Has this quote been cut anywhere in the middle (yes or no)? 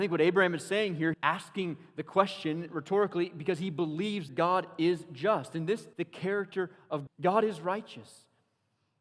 yes